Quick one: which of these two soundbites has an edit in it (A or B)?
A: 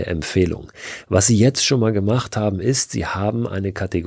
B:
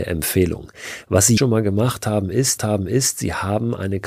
B